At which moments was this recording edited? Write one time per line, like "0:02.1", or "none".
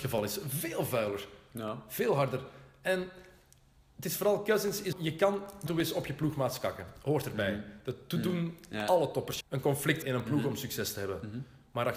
0:04.9
0:05.7
0:09.4
0:10.0